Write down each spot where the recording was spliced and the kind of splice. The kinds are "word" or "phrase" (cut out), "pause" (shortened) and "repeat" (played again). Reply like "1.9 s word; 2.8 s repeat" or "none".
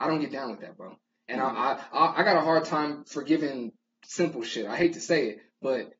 none